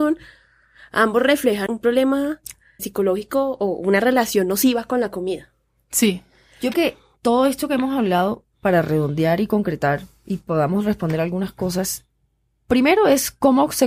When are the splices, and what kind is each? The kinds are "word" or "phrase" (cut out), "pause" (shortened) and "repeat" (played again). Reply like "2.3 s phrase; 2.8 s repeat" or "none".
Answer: 1.7 s word; 2.8 s word; 6.7 s word